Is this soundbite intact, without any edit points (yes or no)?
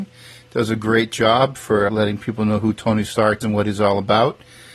no